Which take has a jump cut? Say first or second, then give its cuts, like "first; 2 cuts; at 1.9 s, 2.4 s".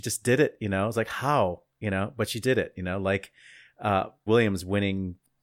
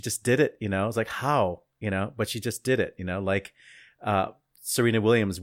first; 2 cuts; at 2.4 s, 4.3 s